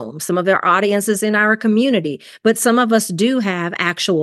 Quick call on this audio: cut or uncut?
uncut